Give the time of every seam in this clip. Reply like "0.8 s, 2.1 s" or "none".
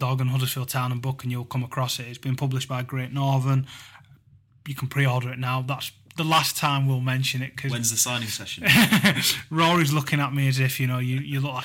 none